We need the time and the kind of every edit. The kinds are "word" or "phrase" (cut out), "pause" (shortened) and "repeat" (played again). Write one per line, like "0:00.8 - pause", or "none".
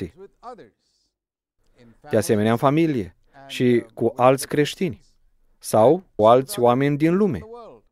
0:06.2 - word